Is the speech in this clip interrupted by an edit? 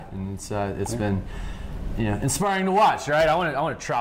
no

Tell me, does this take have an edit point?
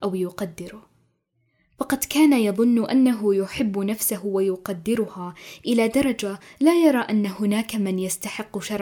no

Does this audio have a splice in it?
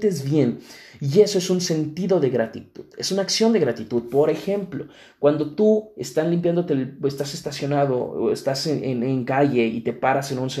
no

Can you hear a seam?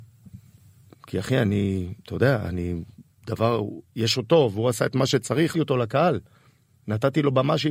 yes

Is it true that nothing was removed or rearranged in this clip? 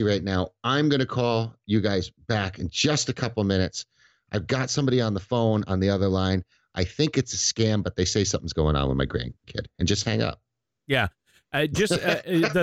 yes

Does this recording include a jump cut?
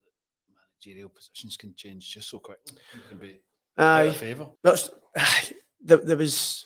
yes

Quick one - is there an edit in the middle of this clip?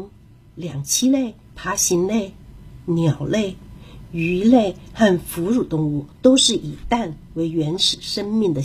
yes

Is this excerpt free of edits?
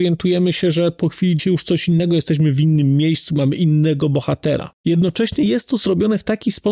no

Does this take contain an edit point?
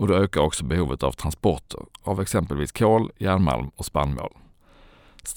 no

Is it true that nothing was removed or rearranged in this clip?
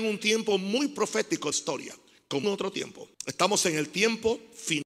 no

